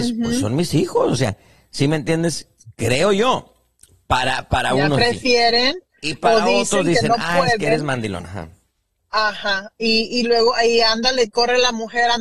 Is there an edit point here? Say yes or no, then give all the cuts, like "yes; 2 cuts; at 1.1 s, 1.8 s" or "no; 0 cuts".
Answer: no; 0 cuts